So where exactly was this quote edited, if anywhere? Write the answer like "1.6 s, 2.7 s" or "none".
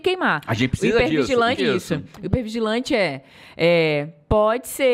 1.6 s